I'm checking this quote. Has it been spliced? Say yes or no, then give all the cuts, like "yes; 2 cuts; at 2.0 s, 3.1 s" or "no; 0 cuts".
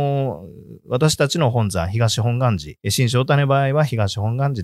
yes; 1 cut; at 2.8 s